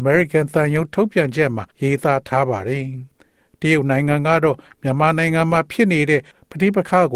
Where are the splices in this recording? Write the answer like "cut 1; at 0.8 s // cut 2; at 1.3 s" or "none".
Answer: cut 1; at 1.7 s